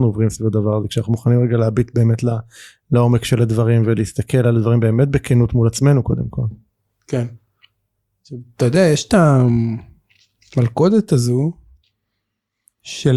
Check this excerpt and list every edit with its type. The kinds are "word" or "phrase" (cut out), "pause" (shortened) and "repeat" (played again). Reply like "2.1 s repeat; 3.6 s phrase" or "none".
none